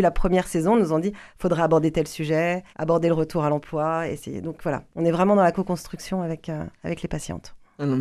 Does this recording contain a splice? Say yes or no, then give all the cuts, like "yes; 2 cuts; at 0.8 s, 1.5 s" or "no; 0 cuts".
yes; 1 cut; at 2.7 s